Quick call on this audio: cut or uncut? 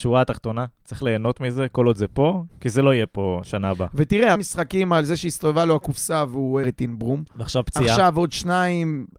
cut